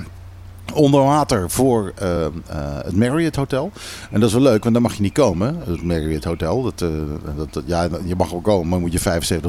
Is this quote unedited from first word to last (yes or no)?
yes